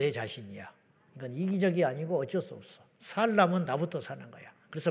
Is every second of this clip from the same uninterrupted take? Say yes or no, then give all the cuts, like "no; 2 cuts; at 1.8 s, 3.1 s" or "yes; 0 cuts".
yes; 0 cuts